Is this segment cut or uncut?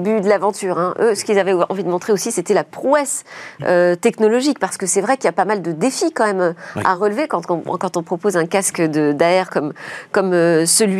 uncut